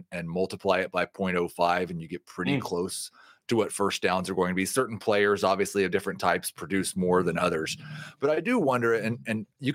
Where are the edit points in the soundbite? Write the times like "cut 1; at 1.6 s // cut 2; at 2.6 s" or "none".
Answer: none